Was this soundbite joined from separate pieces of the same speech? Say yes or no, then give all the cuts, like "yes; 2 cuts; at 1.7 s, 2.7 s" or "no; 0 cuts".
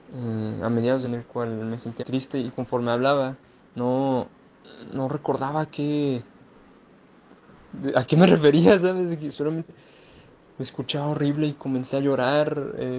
yes; 4 cuts; at 1.0 s, 2.0 s, 3.6 s, 9.7 s